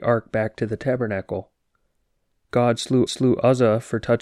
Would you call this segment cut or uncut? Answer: cut